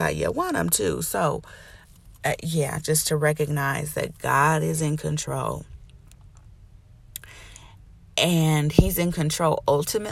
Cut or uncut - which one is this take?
uncut